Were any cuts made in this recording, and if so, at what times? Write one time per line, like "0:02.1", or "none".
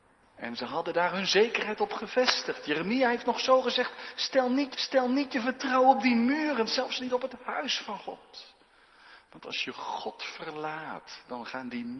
0:04.7